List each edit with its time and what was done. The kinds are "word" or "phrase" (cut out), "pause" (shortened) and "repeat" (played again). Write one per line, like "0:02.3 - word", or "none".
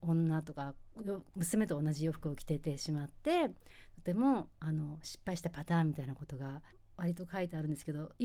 0:06.7 - pause